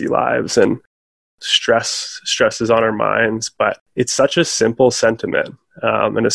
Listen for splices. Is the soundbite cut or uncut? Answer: cut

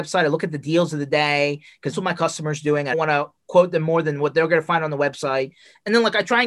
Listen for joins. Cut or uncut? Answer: cut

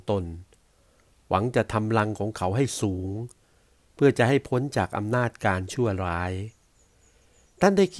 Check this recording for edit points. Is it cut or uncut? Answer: uncut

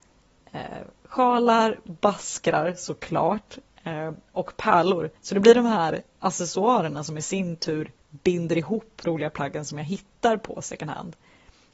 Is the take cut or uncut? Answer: cut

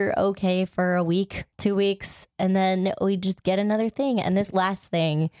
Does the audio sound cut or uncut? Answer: cut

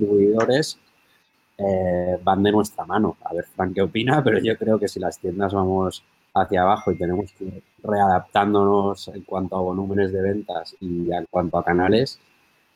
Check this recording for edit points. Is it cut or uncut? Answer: cut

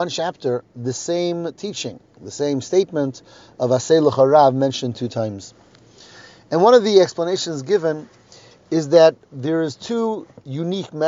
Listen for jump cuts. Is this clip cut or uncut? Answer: uncut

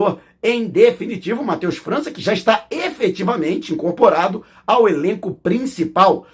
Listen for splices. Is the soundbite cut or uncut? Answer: uncut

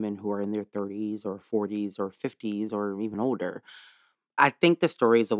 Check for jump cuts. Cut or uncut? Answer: uncut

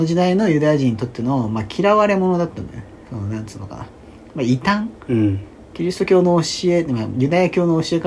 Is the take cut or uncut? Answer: uncut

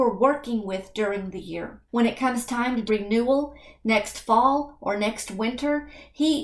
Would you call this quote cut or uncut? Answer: cut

